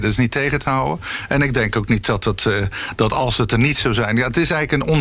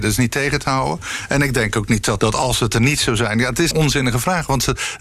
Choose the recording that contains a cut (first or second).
second